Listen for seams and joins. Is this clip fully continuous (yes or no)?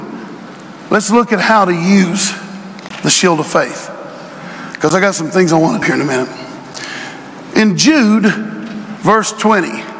no